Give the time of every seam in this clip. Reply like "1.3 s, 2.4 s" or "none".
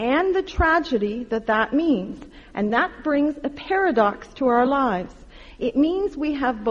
none